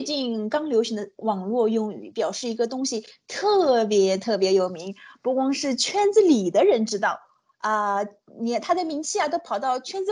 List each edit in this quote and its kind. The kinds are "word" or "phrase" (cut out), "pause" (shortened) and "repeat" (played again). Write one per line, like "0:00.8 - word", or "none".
none